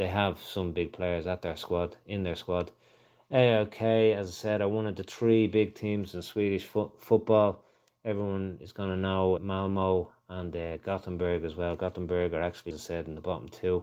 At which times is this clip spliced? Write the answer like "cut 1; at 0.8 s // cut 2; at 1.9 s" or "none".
cut 1; at 9.4 s // cut 2; at 12.7 s